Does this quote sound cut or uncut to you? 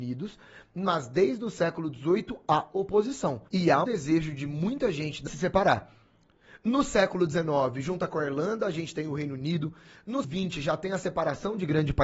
cut